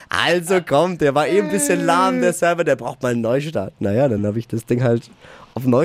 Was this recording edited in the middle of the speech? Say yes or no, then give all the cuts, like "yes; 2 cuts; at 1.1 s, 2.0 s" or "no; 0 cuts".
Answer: no; 0 cuts